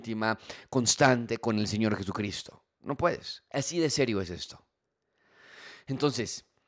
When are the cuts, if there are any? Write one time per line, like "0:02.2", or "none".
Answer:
0:03.5